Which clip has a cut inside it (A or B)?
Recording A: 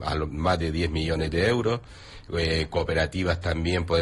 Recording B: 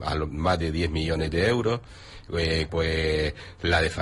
B